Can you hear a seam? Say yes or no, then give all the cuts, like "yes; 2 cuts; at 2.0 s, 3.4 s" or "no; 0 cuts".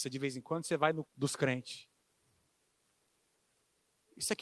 yes; 1 cut; at 1.1 s